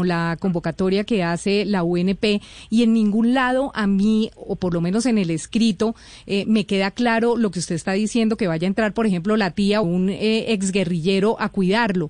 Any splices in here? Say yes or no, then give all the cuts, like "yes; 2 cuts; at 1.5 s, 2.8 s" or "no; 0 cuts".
yes; 1 cut; at 9.8 s